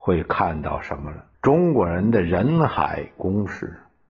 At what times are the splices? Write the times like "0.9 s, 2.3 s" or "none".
1.3 s